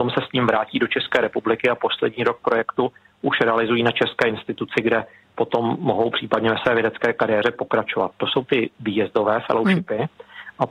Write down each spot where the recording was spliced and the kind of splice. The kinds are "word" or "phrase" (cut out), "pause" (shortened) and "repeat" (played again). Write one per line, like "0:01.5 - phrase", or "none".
none

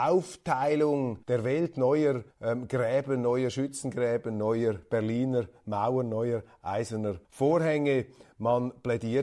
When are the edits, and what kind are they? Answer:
0:01.2 - pause
0:02.3 - pause
0:07.2 - pause

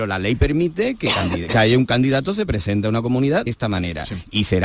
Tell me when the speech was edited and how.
0:03.5 - word

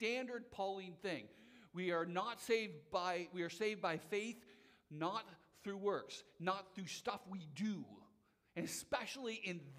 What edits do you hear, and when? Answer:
none

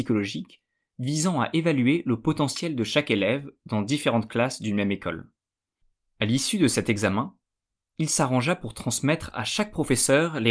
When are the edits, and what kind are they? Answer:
none

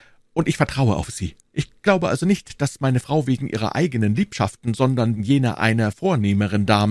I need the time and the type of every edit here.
0:01.5 - pause
0:05.2 - word
0:05.9 - word

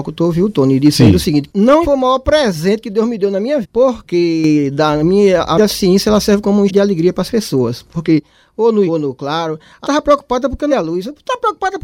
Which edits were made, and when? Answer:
0:01.5 - word
0:01.8 - word
0:03.6 - word
0:05.6 - word
0:06.7 - word
0:08.9 - word
0:09.8 - word
0:10.7 - word

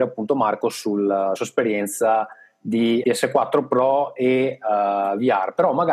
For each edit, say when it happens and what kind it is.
0:01.4 - word
0:03.0 - word

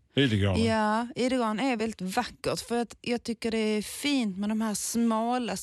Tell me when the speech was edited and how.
0:01.8 - word

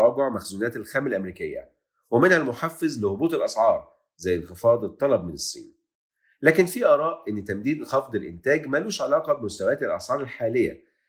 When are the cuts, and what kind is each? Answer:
none

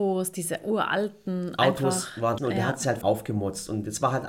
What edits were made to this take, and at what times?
0:02.4 - word
0:03.0 - word

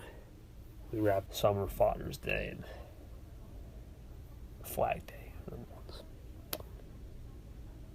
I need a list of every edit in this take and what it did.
0:01.3 - phrase
0:04.6 - word
0:05.6 - word

